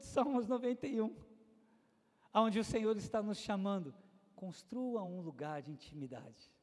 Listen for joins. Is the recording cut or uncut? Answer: uncut